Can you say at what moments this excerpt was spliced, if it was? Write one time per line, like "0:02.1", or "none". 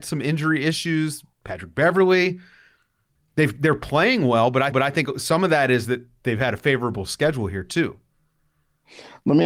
0:04.7